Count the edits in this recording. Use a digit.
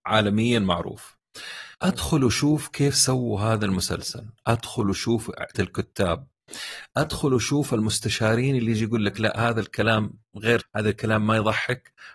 3